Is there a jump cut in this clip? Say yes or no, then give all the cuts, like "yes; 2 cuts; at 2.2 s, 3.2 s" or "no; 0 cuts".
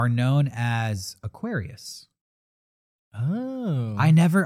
no; 0 cuts